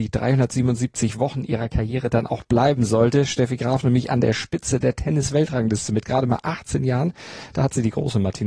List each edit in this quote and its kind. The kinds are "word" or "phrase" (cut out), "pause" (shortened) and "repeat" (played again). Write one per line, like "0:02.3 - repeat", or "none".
none